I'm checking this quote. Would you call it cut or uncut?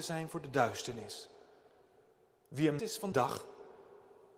cut